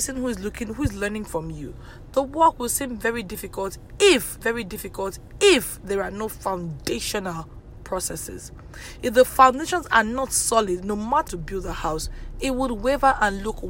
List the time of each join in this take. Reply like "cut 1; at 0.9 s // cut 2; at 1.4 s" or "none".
cut 1; at 4.4 s // cut 2; at 11.3 s